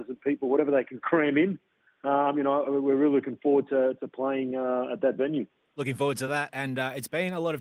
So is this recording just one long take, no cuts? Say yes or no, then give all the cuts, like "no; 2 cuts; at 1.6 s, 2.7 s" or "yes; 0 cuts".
yes; 0 cuts